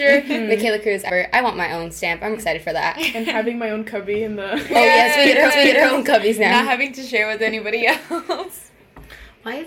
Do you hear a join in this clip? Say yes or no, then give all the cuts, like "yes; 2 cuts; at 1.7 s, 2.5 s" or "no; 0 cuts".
yes; 3 cuts; at 1.1 s, 2.3 s, 5.5 s